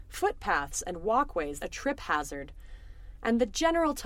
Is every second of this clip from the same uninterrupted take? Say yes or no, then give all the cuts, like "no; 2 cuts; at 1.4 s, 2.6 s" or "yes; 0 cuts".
no; 1 cut; at 1.6 s